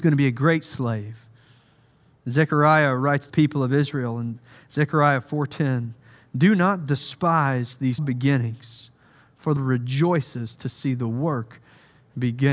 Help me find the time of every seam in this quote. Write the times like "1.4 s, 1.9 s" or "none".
3.3 s, 8.0 s, 9.6 s